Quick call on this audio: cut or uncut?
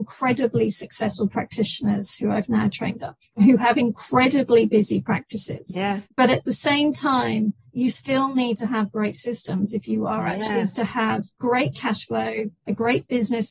cut